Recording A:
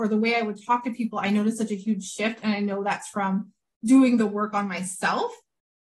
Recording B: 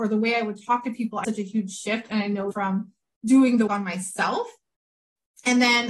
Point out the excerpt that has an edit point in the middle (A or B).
B